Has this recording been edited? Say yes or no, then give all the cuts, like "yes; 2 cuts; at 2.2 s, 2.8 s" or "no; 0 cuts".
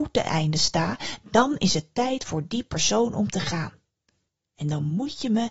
no; 0 cuts